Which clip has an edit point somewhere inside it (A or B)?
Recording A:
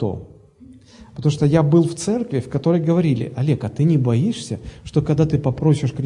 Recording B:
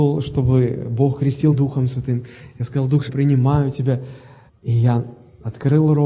B